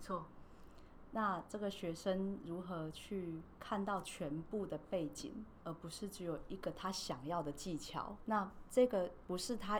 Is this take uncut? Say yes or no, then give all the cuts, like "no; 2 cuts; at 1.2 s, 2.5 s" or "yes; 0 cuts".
no; 2 cuts; at 5.6 s, 8.2 s